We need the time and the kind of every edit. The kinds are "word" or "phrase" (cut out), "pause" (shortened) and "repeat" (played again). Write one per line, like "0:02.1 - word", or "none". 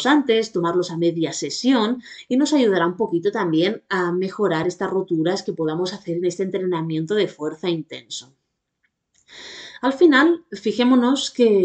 none